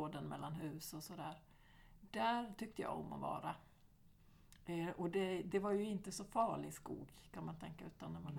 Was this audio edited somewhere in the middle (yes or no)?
no